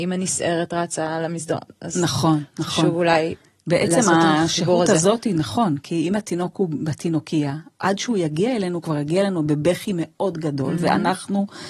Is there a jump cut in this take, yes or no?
no